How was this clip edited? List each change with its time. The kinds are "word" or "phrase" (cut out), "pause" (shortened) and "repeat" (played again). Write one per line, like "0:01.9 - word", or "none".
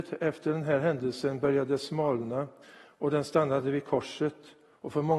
0:02.6 - pause